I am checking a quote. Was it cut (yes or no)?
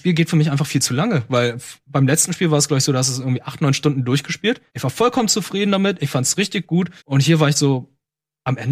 yes